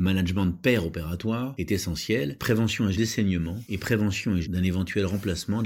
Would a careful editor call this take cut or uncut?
cut